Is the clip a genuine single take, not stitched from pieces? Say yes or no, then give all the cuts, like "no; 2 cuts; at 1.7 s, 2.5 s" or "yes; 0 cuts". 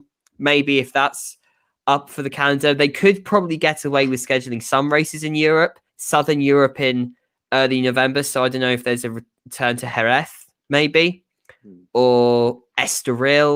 no; 1 cut; at 5.9 s